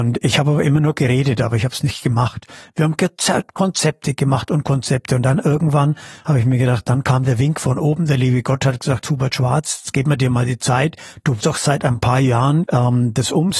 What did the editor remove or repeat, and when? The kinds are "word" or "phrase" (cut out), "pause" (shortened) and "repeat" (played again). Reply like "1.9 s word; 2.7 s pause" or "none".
11.4 s word; 12.6 s word